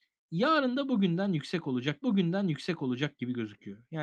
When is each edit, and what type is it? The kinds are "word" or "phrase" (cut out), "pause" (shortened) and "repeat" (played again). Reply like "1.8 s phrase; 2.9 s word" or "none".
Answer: 2.0 s repeat